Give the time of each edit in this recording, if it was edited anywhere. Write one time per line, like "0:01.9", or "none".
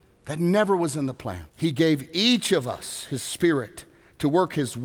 0:01.5